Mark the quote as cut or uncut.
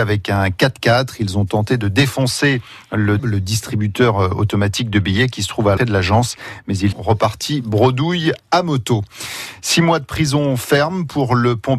cut